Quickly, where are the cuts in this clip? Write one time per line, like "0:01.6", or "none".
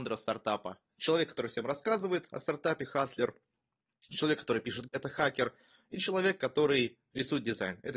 0:04.9